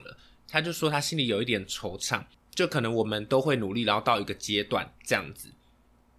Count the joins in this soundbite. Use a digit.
0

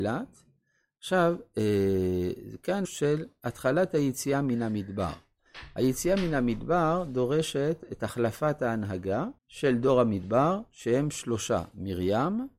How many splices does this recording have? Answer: 2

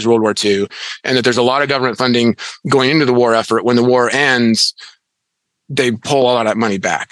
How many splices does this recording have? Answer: 0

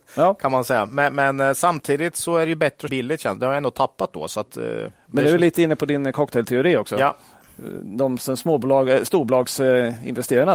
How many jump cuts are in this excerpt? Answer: 1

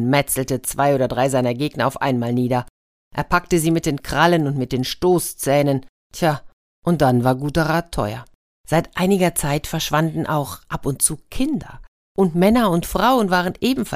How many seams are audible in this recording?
0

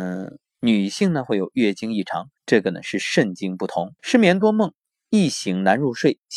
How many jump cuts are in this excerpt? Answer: 2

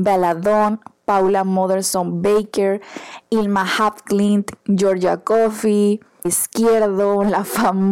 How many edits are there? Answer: 1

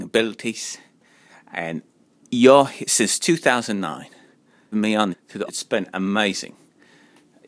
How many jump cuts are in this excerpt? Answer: 3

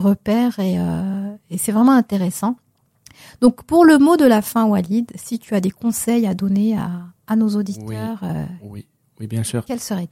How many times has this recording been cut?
0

